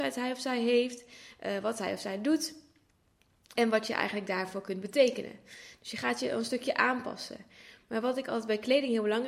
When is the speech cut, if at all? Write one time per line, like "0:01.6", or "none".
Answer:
0:03.5